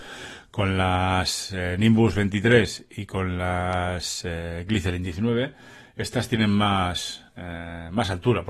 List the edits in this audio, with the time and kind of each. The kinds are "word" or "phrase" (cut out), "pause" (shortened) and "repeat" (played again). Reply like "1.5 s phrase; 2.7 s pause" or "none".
7.3 s pause